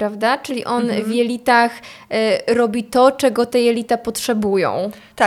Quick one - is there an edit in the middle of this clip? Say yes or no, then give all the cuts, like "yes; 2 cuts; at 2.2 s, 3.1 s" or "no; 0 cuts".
no; 0 cuts